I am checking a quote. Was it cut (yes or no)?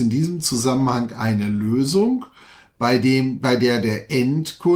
no